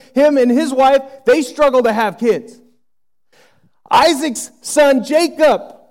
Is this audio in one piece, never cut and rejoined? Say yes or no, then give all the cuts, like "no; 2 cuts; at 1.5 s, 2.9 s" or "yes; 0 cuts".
yes; 0 cuts